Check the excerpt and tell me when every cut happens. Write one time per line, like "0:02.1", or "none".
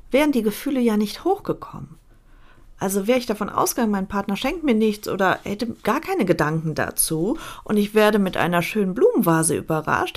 none